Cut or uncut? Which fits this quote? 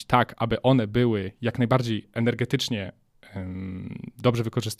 uncut